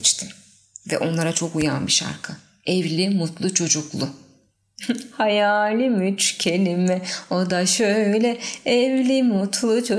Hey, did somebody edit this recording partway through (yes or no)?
no